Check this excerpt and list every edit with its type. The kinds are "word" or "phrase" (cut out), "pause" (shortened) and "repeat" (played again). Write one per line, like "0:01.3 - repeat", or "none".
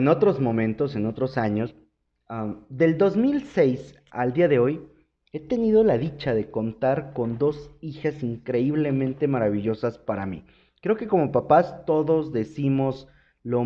none